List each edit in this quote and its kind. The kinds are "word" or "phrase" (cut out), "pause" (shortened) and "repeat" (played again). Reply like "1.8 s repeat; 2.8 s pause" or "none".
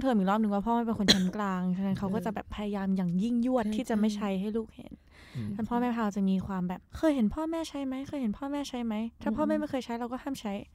6.9 s pause